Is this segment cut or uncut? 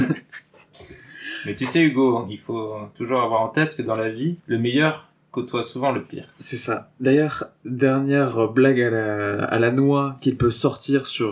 cut